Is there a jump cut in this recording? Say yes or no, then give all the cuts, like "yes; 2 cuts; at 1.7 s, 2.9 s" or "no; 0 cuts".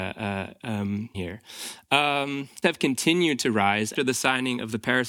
yes; 3 cuts; at 1.1 s, 2.6 s, 4.0 s